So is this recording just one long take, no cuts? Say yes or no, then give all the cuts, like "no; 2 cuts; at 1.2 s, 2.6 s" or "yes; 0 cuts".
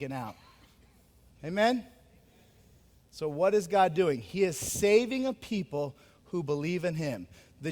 yes; 0 cuts